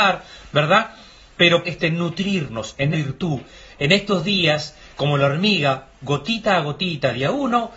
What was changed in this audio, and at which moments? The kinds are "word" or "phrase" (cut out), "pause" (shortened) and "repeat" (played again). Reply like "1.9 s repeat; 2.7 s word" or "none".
1.6 s word; 2.9 s word